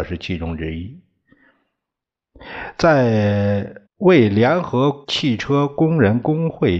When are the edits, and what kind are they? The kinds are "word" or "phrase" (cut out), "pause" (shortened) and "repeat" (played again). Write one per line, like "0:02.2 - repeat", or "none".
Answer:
0:03.9 - pause
0:05.0 - pause